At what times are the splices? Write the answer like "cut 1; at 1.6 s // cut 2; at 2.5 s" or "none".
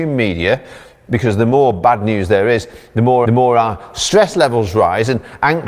cut 1; at 3.2 s